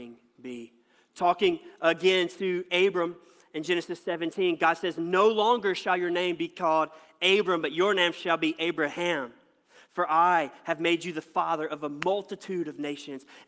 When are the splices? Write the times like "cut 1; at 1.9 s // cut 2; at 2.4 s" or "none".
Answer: none